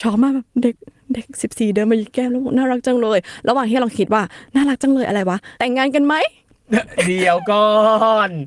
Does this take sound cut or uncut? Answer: cut